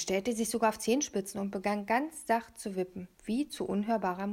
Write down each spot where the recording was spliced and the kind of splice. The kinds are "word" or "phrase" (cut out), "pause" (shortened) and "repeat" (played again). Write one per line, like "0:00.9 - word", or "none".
0:03.1 - pause